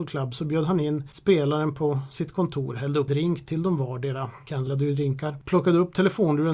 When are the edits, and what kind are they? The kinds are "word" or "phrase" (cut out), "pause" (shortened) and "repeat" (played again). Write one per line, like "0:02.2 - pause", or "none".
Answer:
0:03.1 - word
0:04.7 - word